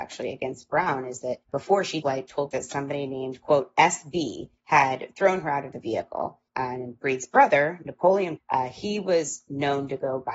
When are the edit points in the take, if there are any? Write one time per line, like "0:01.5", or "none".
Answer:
0:01.4
0:02.0
0:02.5
0:04.6
0:06.5
0:08.4